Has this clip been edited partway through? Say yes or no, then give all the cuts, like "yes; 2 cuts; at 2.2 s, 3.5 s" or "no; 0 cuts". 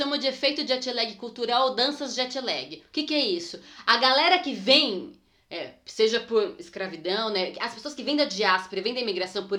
no; 0 cuts